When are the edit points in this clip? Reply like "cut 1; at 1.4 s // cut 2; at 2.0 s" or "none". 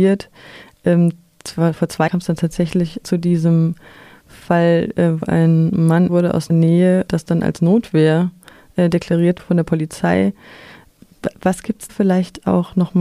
cut 1; at 2.1 s // cut 2; at 3.0 s // cut 3; at 5.2 s // cut 4; at 6.1 s // cut 5; at 6.5 s // cut 6; at 7.1 s // cut 7; at 9.4 s // cut 8; at 11.9 s